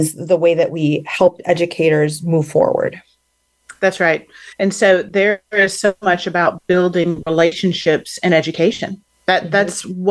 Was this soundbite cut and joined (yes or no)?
yes